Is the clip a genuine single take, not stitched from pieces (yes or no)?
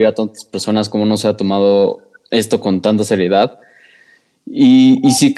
yes